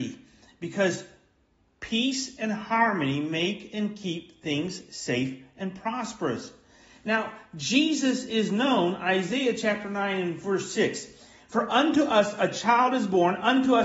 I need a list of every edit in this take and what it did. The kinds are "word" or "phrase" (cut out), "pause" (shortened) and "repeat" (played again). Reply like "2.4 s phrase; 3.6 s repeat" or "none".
none